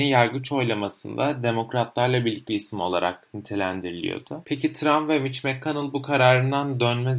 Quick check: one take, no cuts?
no; 1 cut; at 2.5 s

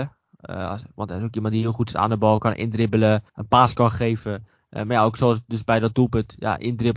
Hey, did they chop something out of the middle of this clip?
yes; 1 cut; at 3.3 s

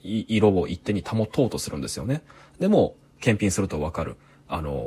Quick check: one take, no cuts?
yes; 0 cuts

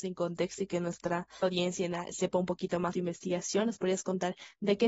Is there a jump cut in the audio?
yes; 2 cuts; at 1.4 s, 2.9 s

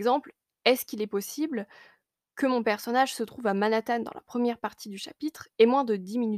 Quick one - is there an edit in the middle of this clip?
no; 0 cuts

